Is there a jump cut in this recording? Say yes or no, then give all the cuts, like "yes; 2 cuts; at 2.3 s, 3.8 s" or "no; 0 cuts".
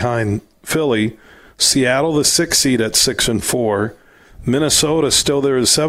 no; 0 cuts